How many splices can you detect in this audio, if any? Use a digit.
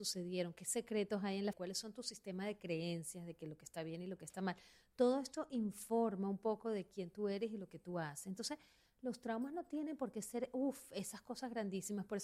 1